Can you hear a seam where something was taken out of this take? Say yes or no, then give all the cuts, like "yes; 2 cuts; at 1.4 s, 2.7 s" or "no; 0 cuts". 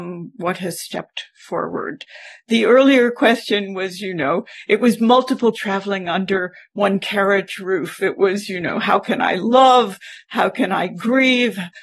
yes; 1 cut; at 5.5 s